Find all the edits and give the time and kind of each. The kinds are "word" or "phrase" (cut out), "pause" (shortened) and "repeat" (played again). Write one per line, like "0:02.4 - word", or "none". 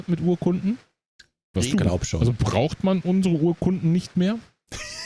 0:01.7 - word